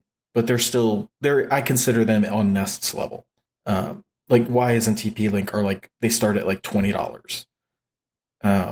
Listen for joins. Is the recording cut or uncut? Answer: cut